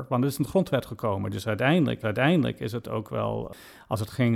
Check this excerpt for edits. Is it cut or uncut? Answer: cut